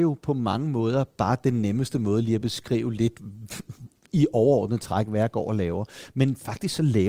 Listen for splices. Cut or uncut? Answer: uncut